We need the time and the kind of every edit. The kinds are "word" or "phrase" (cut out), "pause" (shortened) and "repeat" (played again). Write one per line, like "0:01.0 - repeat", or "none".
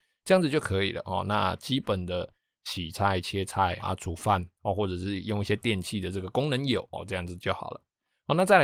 0:03.8 - word